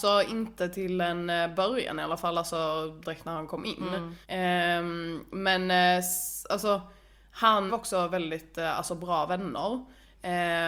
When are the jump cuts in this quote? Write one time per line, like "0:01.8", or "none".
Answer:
0:03.0
0:04.2
0:07.7